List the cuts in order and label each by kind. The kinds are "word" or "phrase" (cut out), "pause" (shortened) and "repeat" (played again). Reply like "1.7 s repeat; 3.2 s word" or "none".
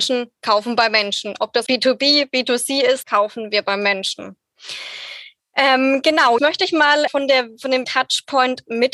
1.7 s word; 3.0 s word; 6.4 s word; 7.1 s word; 7.8 s word